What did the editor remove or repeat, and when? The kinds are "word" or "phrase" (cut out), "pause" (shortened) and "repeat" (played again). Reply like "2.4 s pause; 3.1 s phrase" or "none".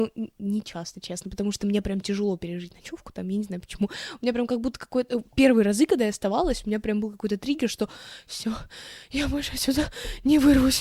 none